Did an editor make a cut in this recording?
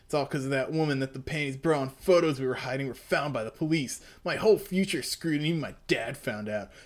no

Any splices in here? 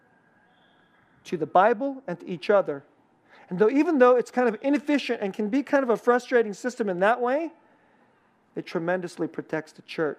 no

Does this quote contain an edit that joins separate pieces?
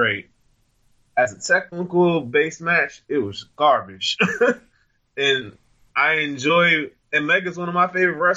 no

